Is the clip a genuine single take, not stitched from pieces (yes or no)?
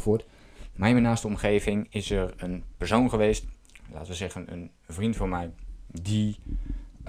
yes